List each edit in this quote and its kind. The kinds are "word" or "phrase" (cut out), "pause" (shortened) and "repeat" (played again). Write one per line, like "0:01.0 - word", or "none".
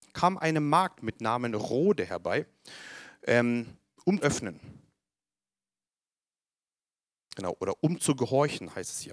0:04.2 - word